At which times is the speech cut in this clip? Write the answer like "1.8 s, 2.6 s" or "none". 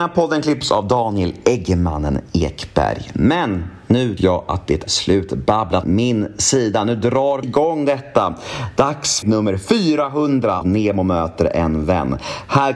4.2 s, 4.9 s, 5.8 s, 7.4 s, 9.2 s, 10.6 s